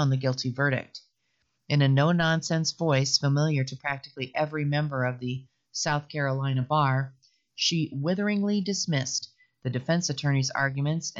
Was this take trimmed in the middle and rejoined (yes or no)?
no